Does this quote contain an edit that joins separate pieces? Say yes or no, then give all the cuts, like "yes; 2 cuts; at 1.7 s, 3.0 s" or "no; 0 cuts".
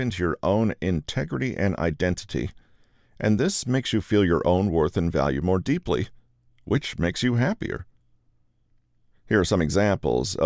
no; 0 cuts